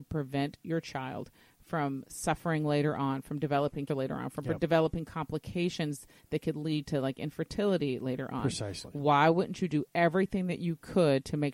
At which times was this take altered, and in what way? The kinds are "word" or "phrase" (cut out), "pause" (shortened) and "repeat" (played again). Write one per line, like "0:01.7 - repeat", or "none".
0:03.9 - word